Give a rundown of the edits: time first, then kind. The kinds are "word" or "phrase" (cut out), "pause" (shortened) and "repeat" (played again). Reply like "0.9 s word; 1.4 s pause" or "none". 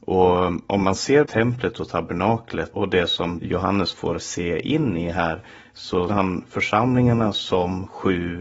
1.3 s word; 2.7 s word; 3.4 s word; 6.1 s word